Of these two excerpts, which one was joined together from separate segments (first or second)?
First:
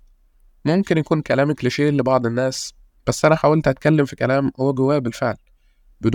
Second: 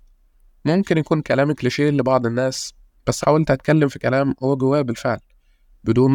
second